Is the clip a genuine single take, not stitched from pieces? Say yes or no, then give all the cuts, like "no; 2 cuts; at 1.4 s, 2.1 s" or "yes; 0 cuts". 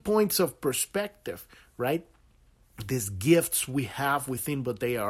yes; 0 cuts